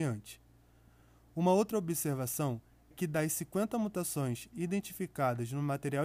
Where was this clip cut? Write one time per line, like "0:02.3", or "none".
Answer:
0:02.9